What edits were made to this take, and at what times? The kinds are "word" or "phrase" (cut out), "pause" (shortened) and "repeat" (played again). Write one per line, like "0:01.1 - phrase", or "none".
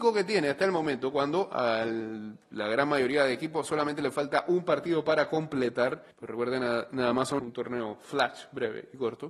0:06.1 - pause
0:07.4 - phrase